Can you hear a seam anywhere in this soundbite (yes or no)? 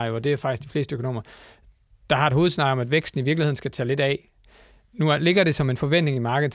no